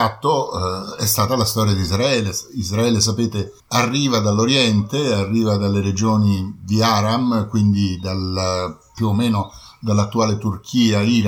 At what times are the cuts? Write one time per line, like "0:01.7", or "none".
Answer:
0:03.6